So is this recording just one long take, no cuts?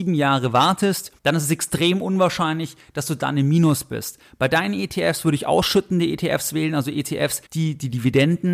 no; 2 cuts; at 1.2 s, 7.5 s

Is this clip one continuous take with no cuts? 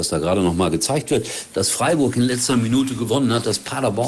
yes; 0 cuts

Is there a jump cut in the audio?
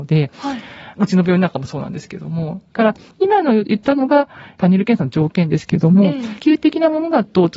yes; 1 cut; at 6.4 s

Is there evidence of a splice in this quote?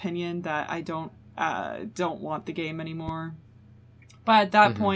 no; 0 cuts

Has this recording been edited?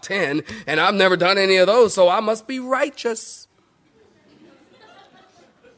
no; 0 cuts

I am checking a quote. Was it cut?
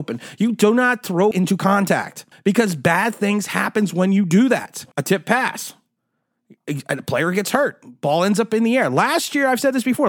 yes; 3 cuts; at 1.3 s, 2.3 s, 4.9 s

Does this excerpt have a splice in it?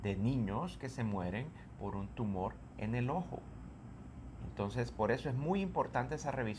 no; 0 cuts

